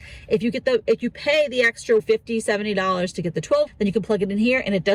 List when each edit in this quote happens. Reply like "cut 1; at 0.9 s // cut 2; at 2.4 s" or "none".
cut 1; at 2.0 s // cut 2; at 3.7 s